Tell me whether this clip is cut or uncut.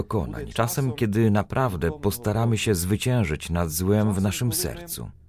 uncut